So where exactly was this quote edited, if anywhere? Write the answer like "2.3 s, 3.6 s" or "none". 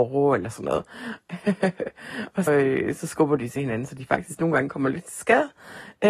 2.5 s